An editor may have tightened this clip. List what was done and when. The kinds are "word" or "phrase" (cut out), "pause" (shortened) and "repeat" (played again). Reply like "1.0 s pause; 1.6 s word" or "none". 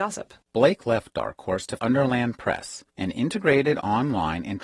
1.8 s word; 2.9 s pause